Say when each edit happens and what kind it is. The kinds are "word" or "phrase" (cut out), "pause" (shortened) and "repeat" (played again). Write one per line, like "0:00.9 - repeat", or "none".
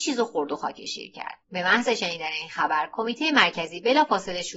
0:01.4 - pause